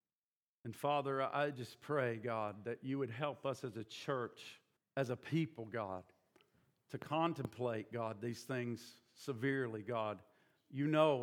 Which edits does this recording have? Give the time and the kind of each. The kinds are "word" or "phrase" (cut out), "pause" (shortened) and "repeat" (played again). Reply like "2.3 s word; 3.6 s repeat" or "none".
4.8 s pause